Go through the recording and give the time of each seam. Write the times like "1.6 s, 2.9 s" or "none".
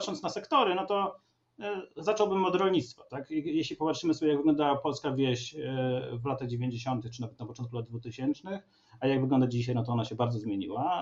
none